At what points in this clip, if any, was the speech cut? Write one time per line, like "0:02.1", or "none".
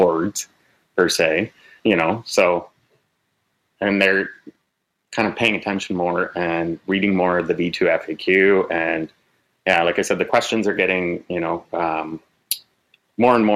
0:01.8